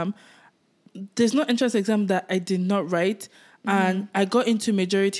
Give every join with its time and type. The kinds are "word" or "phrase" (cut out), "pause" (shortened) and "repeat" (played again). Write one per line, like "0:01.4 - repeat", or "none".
none